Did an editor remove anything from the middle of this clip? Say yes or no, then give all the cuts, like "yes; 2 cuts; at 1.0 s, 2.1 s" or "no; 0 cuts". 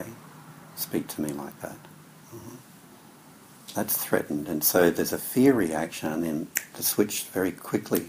no; 0 cuts